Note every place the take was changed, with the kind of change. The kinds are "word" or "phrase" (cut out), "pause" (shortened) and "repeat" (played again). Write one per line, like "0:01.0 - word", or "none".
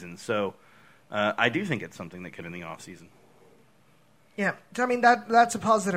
0:02.4 - word